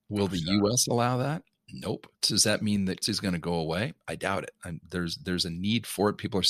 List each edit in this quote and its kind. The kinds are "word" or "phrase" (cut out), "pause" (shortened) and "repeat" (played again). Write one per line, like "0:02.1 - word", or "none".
0:02.1 - pause
0:03.0 - word